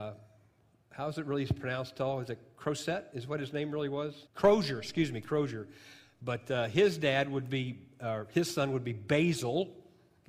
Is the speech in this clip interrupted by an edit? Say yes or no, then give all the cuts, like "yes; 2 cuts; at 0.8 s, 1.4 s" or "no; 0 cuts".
yes; 1 cut; at 4.3 s